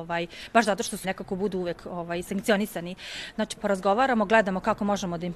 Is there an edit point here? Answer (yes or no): yes